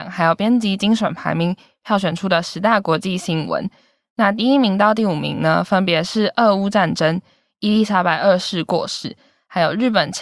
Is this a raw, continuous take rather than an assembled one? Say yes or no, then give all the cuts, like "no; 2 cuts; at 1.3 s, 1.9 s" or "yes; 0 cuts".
yes; 0 cuts